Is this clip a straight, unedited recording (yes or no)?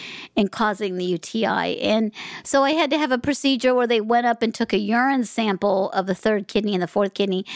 yes